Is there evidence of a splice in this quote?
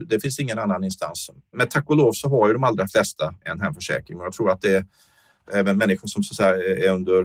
no; 0 cuts

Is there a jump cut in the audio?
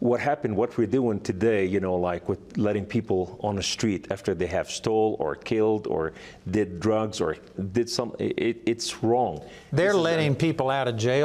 no; 0 cuts

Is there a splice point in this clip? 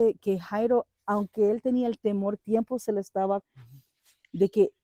yes; 2 cuts; at 2.4 s, 3.4 s

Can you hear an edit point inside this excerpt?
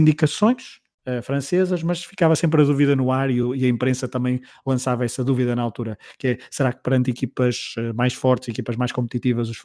no; 0 cuts

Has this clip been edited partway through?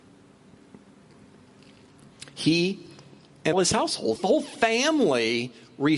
yes; 2 cuts; at 3.5 s, 4.2 s

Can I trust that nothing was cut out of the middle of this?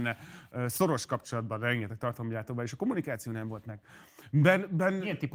yes; 0 cuts

